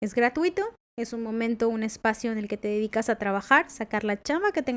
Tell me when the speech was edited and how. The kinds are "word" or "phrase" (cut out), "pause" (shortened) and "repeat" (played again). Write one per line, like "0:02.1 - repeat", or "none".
none